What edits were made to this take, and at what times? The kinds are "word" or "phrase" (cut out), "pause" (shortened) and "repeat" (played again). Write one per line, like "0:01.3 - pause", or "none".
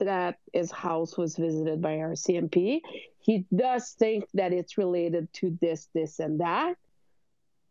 none